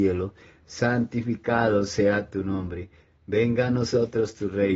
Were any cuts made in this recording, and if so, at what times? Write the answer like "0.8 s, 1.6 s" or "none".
none